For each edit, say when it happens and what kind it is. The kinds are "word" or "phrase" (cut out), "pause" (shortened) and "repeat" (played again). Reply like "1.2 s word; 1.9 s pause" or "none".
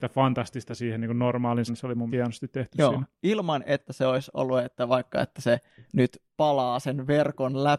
1.7 s word; 2.1 s word